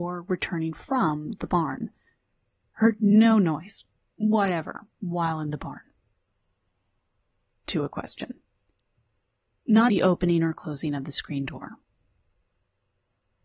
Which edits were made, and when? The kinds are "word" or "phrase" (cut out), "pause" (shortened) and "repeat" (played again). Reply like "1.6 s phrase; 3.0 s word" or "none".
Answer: 9.9 s word